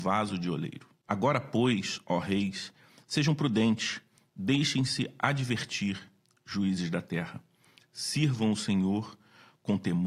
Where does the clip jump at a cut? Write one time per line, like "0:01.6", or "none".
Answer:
none

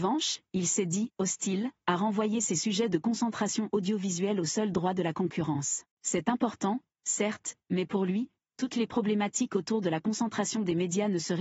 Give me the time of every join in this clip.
0:05.9

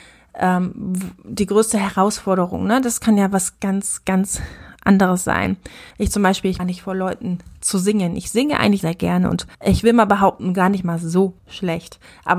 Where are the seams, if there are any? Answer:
0:03.5
0:05.9
0:06.6
0:08.8
0:09.5
0:11.4

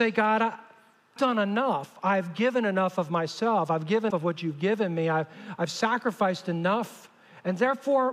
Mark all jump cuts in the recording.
0:01.2
0:04.1

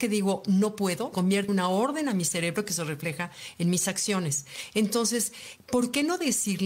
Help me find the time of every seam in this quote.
0:01.1
0:01.5

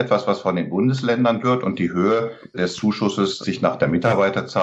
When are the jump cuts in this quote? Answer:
0:01.4
0:02.5
0:03.4

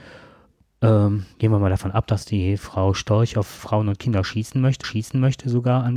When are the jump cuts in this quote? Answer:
0:01.3
0:03.6
0:04.8

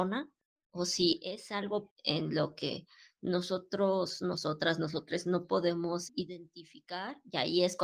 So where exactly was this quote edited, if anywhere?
0:01.9
0:06.1

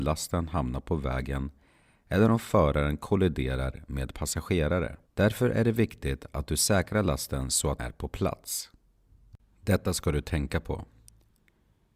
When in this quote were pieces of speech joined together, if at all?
0:05.1
0:07.8

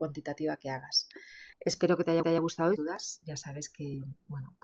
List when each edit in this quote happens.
0:01.5
0:02.2
0:02.8

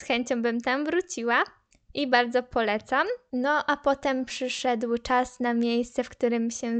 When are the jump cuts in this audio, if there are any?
none

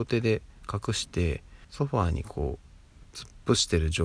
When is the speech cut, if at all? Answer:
0:01.6

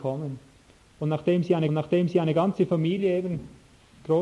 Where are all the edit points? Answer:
0:01.7

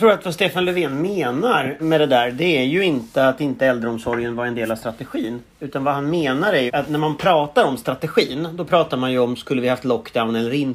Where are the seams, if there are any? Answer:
0:01.8
0:06.7

